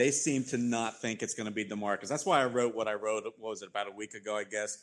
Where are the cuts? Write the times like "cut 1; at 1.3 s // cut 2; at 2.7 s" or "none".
none